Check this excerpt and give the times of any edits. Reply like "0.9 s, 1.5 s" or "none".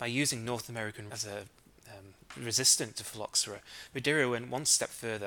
1.1 s